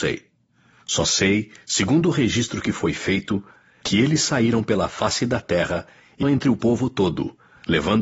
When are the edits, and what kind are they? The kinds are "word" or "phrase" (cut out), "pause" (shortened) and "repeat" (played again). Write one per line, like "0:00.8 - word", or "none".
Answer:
0:06.2 - word

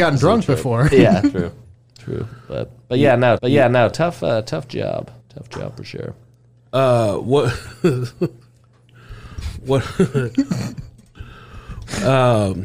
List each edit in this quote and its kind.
0:00.9 - word
0:01.6 - pause
0:03.4 - repeat
0:05.2 - pause

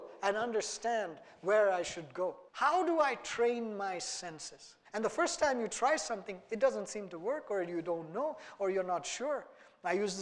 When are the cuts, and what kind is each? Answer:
0:02.5 - pause
0:04.9 - pause

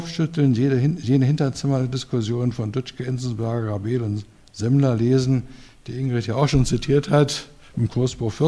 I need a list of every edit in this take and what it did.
none

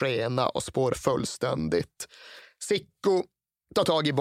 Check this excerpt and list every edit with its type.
0:00.9 - word

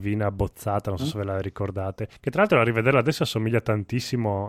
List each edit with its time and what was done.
0:02.2 - pause

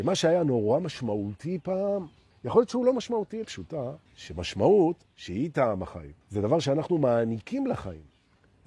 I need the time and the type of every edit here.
0:02.3 - pause
0:03.4 - phrase
0:04.1 - pause
0:06.2 - pause

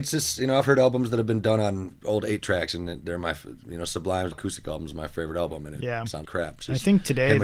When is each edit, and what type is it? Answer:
0:04.3 - phrase
0:06.2 - word

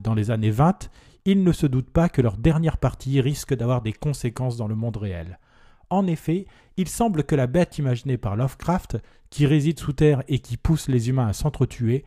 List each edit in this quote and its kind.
none

